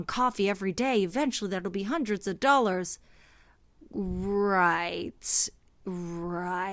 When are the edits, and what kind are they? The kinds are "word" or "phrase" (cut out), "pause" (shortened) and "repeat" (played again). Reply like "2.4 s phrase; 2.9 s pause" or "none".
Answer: none